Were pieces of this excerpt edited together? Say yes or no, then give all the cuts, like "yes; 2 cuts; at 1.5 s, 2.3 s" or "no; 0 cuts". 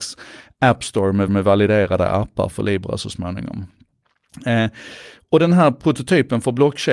yes; 2 cuts; at 1.3 s, 2.5 s